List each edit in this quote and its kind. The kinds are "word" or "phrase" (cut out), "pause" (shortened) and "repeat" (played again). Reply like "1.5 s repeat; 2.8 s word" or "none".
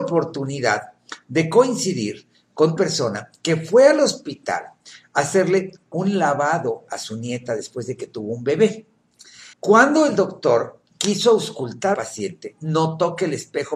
2.8 s word; 9.5 s pause; 10.9 s pause; 11.9 s phrase